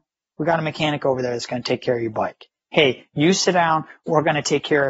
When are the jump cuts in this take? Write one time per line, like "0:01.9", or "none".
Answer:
none